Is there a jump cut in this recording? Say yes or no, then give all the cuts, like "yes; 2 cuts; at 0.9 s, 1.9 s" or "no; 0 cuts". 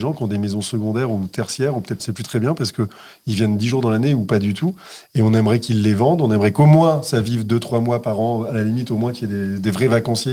yes; 1 cut; at 2.0 s